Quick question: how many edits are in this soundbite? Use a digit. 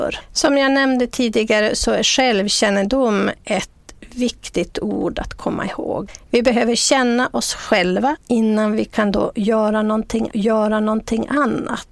1